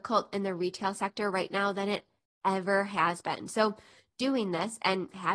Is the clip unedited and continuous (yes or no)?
yes